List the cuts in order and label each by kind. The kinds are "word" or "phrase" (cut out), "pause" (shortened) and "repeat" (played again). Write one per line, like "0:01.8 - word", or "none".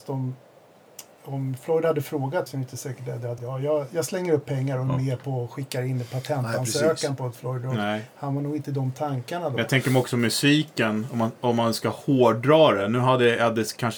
0:02.5 - word
0:03.4 - phrase